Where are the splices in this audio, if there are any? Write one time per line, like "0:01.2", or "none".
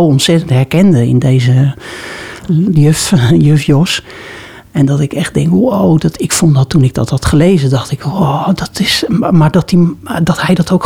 none